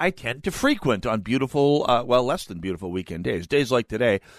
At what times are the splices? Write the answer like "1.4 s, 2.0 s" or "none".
none